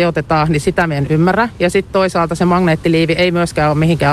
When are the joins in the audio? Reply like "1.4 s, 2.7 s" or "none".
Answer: none